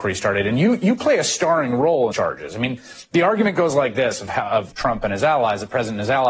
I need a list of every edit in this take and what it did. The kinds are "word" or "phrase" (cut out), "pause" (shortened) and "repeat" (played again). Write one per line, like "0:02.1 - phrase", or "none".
0:02.1 - phrase
0:04.7 - phrase

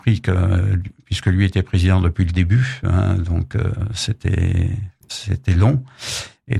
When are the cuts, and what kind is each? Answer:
none

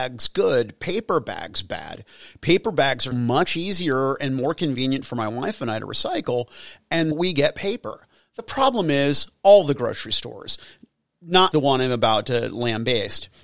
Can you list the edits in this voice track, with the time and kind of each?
0:03.1 - word
0:07.1 - word
0:11.5 - word

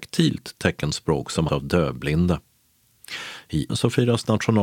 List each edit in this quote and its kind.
0:01.5 - word
0:03.7 - word

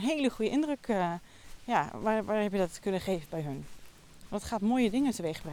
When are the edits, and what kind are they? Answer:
none

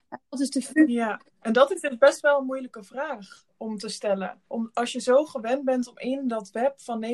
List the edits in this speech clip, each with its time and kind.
0:04.5 - pause

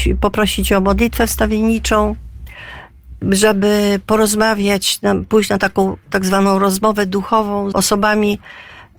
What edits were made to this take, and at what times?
0:07.7 - word

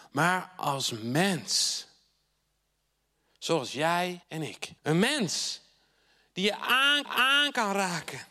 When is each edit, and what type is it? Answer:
0:04.2 - pause
0:04.8 - pause
0:07.0 - repeat

